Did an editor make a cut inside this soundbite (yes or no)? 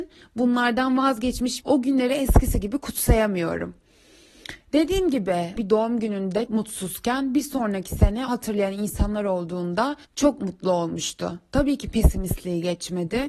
yes